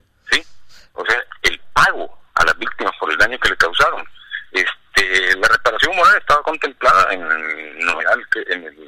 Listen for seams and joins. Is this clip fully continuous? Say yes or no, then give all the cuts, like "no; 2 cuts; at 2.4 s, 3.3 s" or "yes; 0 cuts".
yes; 0 cuts